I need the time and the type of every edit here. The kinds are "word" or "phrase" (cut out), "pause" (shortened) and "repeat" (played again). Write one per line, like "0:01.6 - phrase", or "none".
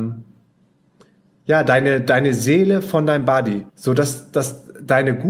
0:03.7 - pause